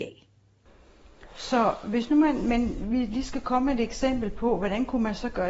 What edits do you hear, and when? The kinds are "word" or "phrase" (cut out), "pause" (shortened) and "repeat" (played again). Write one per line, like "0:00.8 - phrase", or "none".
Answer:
none